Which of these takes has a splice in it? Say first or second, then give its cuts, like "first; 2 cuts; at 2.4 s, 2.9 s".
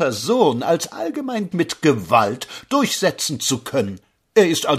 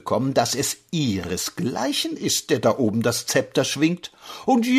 first; 1 cut; at 1.5 s